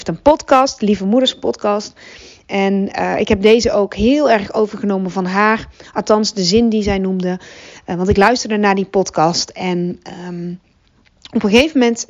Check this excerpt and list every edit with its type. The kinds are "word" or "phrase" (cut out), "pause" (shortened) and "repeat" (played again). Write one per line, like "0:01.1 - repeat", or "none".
none